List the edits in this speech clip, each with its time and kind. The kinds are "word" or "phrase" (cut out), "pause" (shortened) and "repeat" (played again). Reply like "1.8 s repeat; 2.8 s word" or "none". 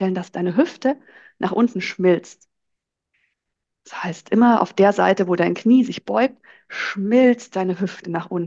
none

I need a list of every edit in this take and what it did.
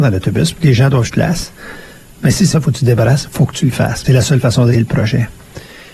1.1 s word; 2.5 s word; 4.0 s word; 4.7 s word

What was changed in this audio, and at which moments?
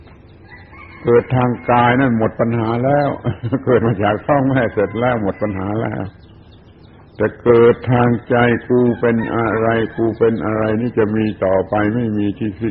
none

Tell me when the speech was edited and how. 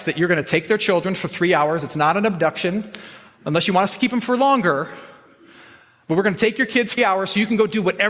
7.0 s word

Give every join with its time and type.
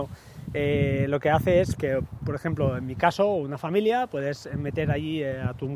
1.8 s word

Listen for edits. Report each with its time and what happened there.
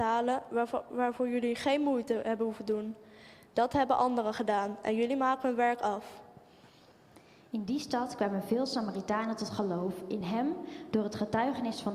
none

